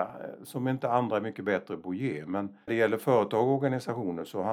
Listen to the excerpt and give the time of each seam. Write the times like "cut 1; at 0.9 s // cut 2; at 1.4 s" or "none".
cut 1; at 2.7 s